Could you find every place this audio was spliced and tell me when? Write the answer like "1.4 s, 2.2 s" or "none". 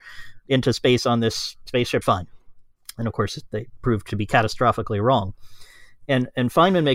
2.0 s